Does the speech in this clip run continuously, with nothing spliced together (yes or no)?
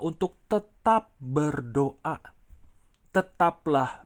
yes